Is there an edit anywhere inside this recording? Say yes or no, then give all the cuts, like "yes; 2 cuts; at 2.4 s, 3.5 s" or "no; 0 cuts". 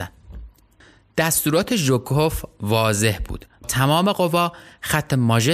yes; 1 cut; at 3.6 s